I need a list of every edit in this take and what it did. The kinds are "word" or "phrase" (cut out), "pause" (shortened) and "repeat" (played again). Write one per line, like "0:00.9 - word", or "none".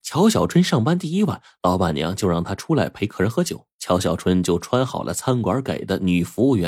0:03.7 - pause